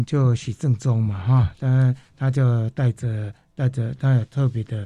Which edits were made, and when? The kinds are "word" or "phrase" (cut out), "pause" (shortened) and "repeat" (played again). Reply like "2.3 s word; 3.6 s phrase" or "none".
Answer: none